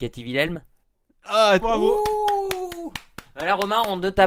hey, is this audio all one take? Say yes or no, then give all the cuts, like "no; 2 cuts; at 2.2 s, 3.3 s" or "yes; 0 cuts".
no; 1 cut; at 1.6 s